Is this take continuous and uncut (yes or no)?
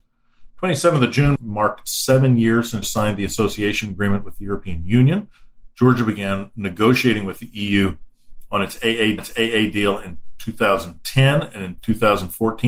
no